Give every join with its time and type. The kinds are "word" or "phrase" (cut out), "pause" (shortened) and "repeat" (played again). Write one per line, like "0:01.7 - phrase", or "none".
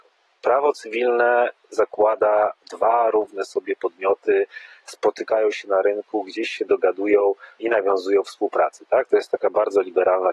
0:02.6 - word